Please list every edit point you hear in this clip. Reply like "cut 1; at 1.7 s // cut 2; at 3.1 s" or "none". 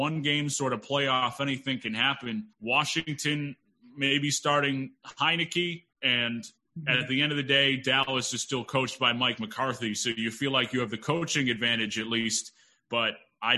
cut 1; at 2.5 s // cut 2; at 5.9 s